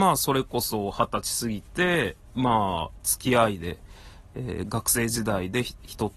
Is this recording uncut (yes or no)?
yes